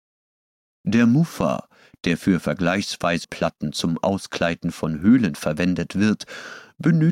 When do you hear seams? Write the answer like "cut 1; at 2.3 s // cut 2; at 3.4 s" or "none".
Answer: cut 1; at 3.2 s